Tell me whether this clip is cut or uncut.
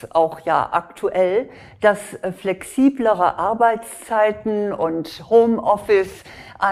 uncut